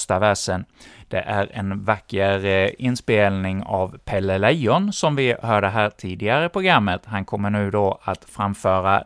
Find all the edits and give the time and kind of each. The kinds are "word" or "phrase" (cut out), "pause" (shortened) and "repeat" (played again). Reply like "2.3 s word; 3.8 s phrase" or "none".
none